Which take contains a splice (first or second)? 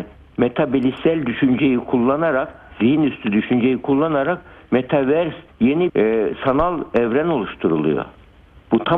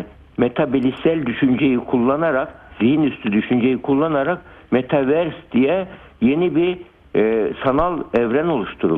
first